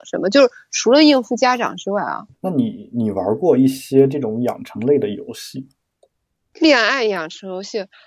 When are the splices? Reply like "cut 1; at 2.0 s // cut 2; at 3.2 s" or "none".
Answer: cut 1; at 2.3 s